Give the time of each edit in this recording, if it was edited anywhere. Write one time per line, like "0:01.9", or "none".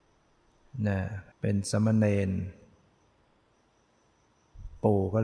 0:01.3